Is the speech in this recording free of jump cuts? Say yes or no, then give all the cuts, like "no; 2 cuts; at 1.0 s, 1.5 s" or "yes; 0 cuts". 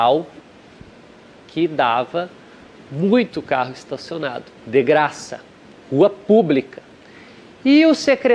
yes; 0 cuts